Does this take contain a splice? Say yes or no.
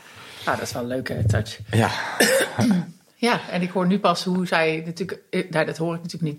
no